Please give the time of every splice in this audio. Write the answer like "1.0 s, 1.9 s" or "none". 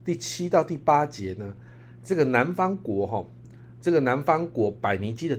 none